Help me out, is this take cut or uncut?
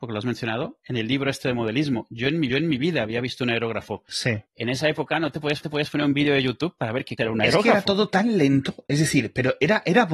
cut